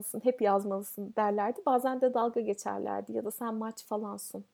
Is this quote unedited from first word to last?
yes; 0 cuts

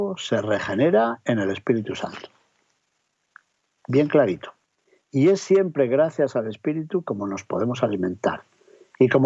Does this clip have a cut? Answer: no; 0 cuts

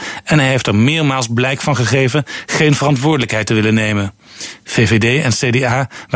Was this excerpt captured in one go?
yes; 0 cuts

